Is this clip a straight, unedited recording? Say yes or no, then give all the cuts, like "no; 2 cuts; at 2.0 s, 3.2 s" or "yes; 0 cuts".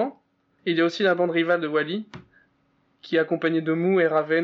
yes; 0 cuts